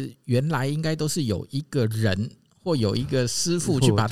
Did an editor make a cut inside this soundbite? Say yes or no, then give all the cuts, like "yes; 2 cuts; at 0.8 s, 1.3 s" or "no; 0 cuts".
no; 0 cuts